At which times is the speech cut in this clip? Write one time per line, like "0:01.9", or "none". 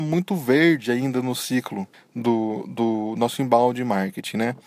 0:01.9